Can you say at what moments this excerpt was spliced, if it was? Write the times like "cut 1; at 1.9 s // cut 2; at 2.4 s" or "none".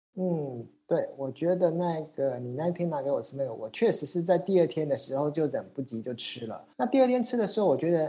cut 1; at 6.7 s